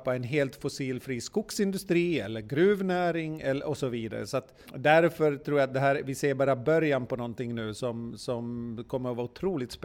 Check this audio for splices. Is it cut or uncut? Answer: cut